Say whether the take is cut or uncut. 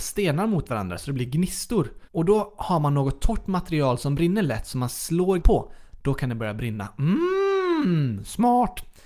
cut